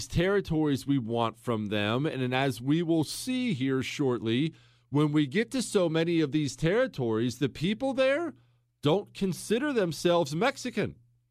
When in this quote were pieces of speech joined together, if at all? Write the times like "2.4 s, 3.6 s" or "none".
none